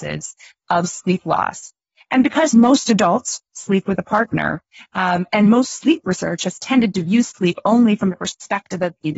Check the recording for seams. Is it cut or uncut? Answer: uncut